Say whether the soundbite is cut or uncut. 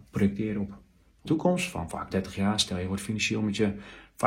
cut